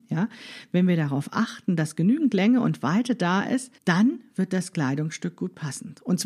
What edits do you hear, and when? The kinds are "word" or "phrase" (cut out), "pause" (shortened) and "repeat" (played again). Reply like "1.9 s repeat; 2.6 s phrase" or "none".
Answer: 3.8 s pause